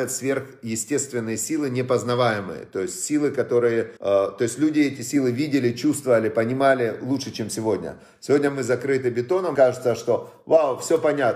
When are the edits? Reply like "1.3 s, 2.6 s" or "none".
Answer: 4.0 s, 9.5 s